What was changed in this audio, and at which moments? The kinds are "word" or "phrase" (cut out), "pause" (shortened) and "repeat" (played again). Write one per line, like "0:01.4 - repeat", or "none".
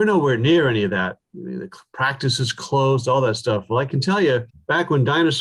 0:04.5 - pause